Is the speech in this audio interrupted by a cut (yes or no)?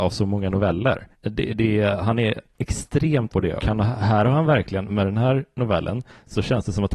yes